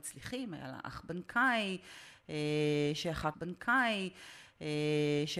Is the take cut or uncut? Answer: cut